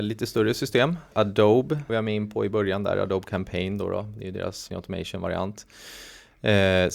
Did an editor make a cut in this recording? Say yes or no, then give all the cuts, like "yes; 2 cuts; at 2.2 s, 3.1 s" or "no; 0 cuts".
yes; 2 cuts; at 1.9 s, 4.7 s